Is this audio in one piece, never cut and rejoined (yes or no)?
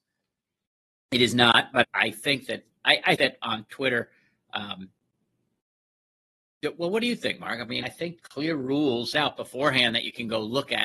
no